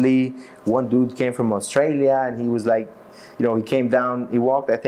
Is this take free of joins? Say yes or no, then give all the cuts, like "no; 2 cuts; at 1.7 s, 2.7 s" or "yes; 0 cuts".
no; 1 cut; at 3.3 s